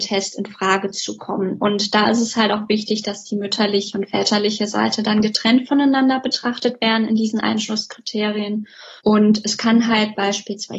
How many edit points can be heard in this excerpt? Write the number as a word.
one